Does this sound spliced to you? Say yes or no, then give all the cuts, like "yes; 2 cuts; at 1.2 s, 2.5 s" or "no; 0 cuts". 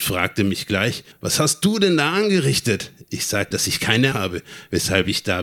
yes; 3 cuts; at 1.1 s, 3.5 s, 4.1 s